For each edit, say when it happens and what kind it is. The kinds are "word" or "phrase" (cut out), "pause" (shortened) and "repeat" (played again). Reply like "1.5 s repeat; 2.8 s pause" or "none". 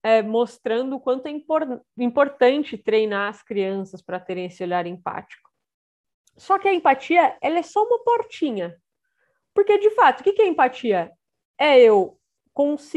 none